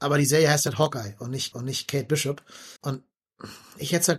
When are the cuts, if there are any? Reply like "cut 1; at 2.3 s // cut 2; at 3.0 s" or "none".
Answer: cut 1; at 1.5 s // cut 2; at 2.8 s